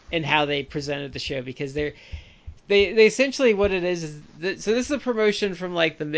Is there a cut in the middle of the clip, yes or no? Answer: yes